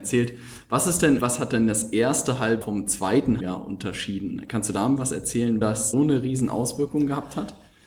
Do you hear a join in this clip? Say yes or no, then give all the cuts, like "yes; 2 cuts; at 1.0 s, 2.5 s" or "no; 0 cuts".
yes; 6 cuts; at 1.2 s, 2.6 s, 3.4 s, 5.0 s, 5.6 s, 5.9 s